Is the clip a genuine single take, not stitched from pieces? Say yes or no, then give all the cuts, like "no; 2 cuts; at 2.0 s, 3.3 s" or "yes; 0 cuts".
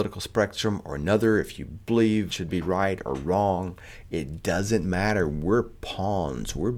no; 1 cut; at 2.3 s